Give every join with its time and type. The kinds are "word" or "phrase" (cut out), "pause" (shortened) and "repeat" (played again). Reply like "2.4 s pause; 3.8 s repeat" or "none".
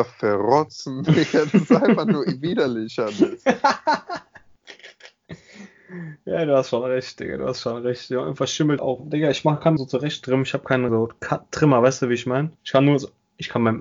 8.8 s word; 9.8 s phrase; 10.9 s word; 12.6 s pause